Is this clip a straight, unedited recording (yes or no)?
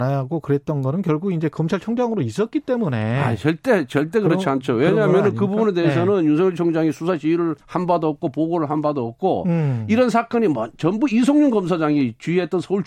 no